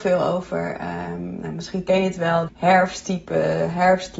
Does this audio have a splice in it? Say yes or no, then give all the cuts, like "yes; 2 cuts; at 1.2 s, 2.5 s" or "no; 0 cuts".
yes; 1 cut; at 2.5 s